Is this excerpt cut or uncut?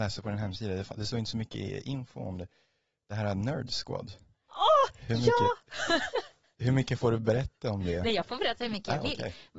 uncut